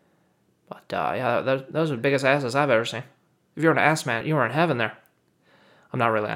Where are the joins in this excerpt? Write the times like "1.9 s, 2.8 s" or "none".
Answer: 2.0 s, 4.2 s